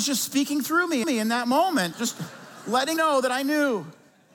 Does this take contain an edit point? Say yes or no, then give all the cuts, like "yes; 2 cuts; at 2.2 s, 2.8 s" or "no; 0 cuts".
yes; 3 cuts; at 1.0 s, 1.9 s, 3.0 s